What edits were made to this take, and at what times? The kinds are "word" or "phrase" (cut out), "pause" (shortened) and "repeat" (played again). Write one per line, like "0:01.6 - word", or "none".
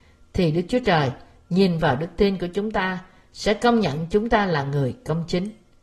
none